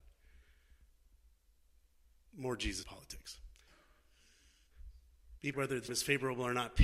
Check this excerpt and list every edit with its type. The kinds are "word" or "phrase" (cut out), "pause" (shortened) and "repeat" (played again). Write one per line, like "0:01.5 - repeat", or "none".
0:02.8 - word
0:05.5 - word
0:05.9 - word